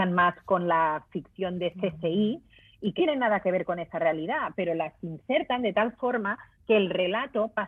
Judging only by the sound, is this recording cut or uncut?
cut